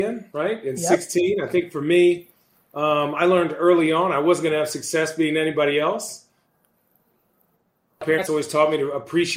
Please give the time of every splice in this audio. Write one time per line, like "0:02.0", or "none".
none

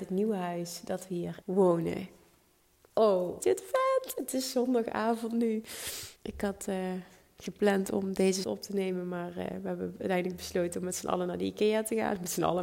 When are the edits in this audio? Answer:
0:01.4
0:03.4
0:06.2
0:08.4

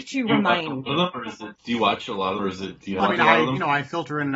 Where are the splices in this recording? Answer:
0:01.6
0:02.4
0:03.0

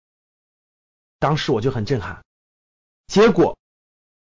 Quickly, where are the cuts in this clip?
0:02.6

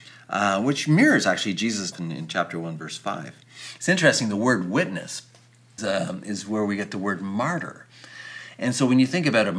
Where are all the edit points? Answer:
0:01.9
0:05.8

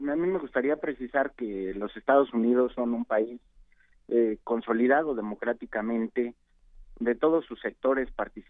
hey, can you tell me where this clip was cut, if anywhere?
none

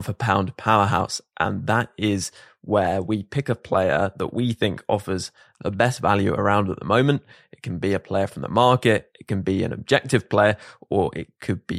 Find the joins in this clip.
none

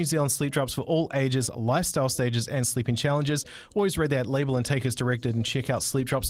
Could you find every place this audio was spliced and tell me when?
none

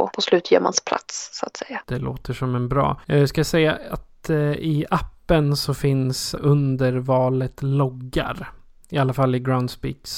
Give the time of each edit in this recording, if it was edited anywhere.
0:03.0
0:06.4

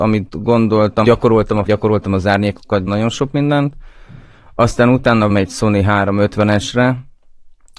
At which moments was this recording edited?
0:01.0
0:01.7
0:02.9
0:05.3

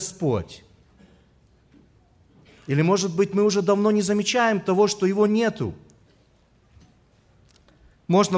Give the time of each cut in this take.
none

